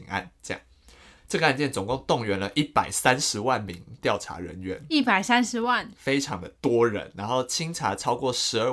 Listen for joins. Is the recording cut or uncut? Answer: cut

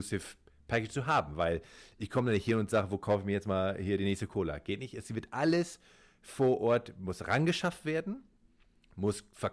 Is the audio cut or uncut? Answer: uncut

